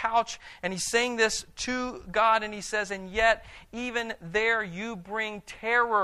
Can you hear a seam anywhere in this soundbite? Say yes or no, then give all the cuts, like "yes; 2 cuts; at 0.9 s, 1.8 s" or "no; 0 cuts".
no; 0 cuts